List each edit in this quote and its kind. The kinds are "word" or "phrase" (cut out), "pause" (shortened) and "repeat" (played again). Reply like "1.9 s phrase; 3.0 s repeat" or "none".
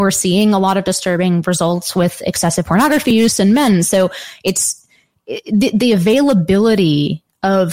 none